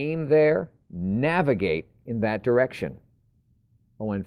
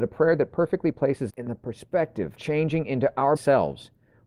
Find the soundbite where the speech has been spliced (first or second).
second